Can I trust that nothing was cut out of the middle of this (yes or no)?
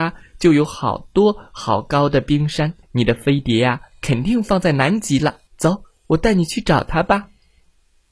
no